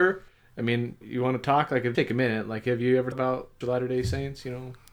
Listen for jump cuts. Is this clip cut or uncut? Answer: cut